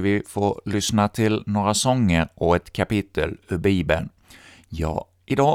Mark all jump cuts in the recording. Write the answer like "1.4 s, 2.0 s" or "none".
none